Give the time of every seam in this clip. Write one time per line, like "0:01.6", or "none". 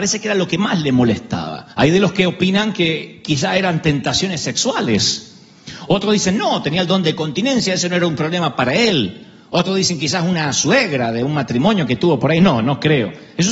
0:01.7